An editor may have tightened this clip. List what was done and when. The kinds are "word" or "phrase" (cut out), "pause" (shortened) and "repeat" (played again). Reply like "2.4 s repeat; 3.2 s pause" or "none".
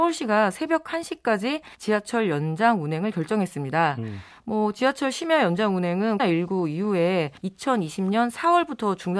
1.7 s pause; 6.2 s word; 7.4 s pause